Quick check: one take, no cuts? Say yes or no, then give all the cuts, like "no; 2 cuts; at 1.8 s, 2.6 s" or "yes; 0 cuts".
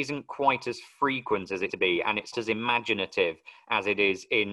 no; 2 cuts; at 1.7 s, 2.3 s